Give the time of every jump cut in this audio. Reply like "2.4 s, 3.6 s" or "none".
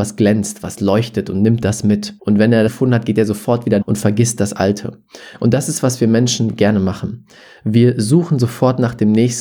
2.2 s, 2.7 s, 3.8 s